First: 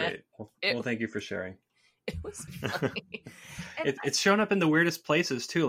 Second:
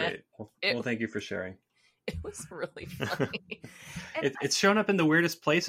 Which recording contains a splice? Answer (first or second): first